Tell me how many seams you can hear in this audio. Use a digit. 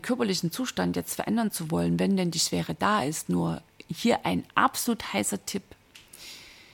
0